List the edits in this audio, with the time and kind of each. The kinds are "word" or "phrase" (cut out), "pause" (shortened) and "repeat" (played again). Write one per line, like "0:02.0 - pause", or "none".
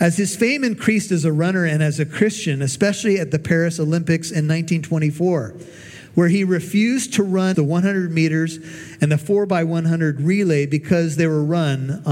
0:07.5 - phrase